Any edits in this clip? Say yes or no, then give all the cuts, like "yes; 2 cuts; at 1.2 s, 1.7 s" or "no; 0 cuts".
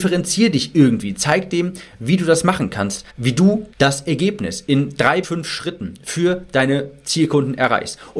yes; 3 cuts; at 3.1 s, 3.7 s, 5.2 s